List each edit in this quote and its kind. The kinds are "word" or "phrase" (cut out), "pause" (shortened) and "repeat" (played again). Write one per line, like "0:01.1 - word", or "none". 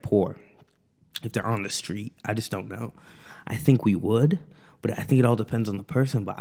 none